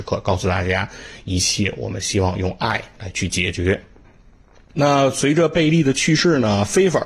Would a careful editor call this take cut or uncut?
uncut